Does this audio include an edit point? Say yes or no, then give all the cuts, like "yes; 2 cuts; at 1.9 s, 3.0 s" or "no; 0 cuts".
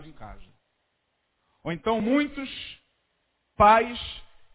no; 0 cuts